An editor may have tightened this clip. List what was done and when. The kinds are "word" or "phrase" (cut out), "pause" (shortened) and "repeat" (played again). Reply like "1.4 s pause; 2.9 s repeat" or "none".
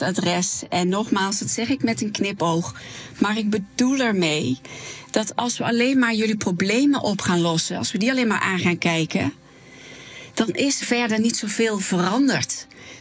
10.8 s word